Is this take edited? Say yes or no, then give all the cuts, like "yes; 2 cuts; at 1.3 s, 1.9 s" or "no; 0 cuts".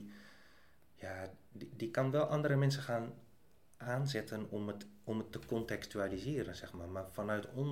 no; 0 cuts